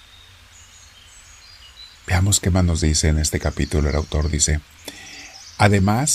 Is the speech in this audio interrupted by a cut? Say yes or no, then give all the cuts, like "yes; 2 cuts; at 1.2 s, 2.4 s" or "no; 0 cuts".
yes; 1 cut; at 1.9 s